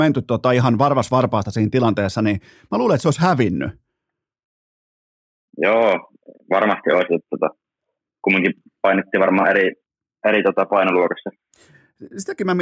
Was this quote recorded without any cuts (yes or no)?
yes